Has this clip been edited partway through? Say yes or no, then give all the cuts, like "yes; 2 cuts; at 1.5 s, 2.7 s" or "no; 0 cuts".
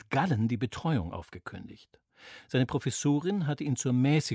no; 0 cuts